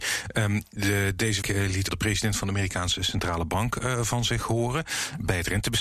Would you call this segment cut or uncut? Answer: cut